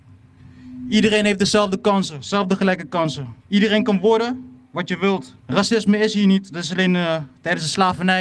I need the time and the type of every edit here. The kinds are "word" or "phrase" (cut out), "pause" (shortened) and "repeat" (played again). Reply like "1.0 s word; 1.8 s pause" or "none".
3.4 s pause; 4.6 s pause; 5.4 s pause